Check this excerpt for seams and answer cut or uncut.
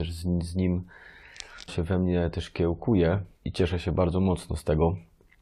cut